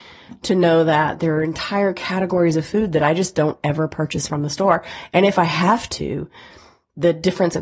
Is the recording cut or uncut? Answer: uncut